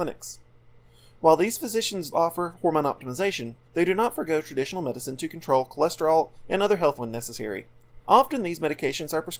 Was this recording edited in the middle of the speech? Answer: yes; 4 cuts; at 2.1 s, 3.6 s, 6.9 s, 8.0 s

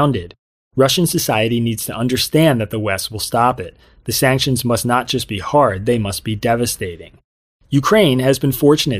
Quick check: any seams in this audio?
no; 0 cuts

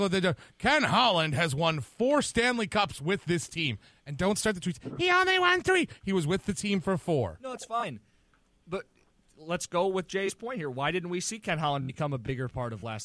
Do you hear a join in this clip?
no; 0 cuts

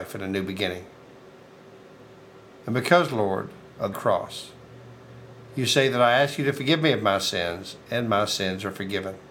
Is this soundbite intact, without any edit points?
no; 1 cut; at 3.9 s

